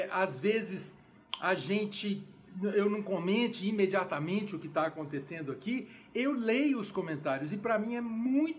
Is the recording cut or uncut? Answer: uncut